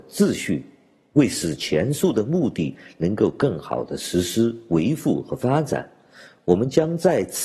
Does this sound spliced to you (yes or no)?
no